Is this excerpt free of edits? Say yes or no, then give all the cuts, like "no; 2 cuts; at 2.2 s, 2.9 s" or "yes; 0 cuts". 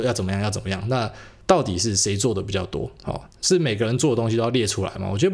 yes; 0 cuts